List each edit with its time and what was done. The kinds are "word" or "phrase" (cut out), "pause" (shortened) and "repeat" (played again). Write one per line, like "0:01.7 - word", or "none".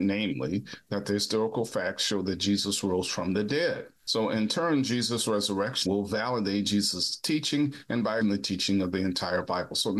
0:04.0 - pause
0:05.9 - word
0:08.2 - word

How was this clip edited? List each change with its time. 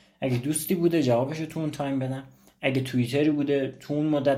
none

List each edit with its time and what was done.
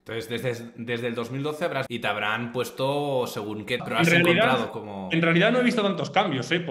0:01.9 - phrase
0:03.8 - word

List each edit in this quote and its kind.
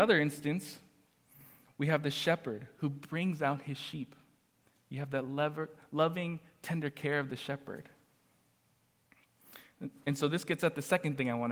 none

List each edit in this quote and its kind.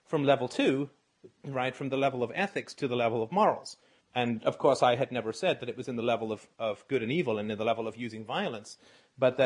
0:04.0 - pause

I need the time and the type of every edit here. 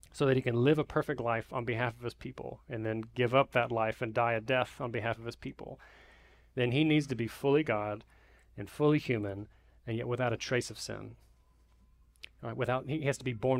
none

